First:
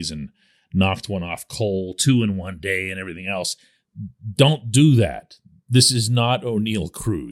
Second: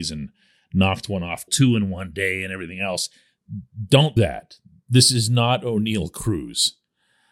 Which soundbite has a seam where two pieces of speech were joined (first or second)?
second